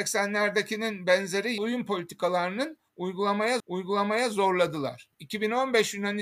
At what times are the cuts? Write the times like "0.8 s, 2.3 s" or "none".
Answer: 1.6 s, 3.6 s